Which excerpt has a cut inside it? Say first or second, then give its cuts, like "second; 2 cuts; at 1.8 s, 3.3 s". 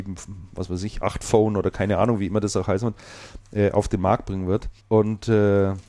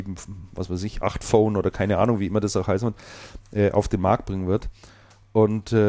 first; 1 cut; at 4.8 s